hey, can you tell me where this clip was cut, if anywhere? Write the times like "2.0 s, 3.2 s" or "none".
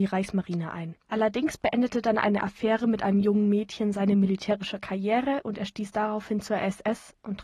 1.0 s